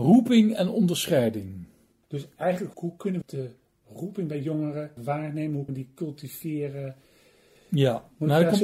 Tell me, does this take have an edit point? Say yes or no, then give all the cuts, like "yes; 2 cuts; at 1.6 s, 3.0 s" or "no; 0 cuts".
yes; 4 cuts; at 2.7 s, 3.2 s, 5.0 s, 5.7 s